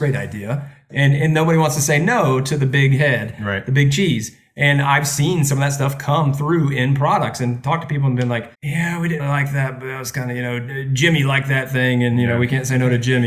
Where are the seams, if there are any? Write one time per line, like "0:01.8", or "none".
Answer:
0:08.5
0:09.2